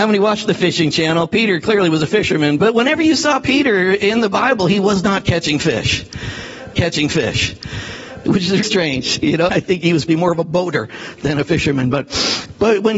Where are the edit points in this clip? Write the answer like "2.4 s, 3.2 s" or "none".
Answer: 2.6 s, 6.7 s, 8.6 s, 9.5 s, 10.1 s